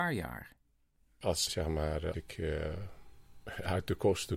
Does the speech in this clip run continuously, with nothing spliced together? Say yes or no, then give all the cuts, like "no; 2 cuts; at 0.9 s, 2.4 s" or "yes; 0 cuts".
no; 2 cuts; at 1.5 s, 2.1 s